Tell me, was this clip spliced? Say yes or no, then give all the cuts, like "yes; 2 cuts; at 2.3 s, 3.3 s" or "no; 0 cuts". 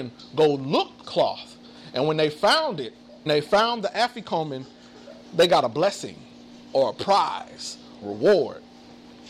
yes; 4 cuts; at 1.0 s, 3.3 s, 5.2 s, 8.0 s